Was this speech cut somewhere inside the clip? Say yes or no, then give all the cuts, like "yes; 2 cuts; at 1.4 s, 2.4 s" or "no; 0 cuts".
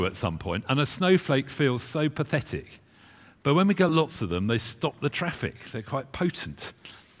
no; 0 cuts